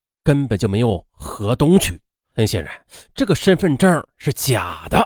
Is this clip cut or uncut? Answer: cut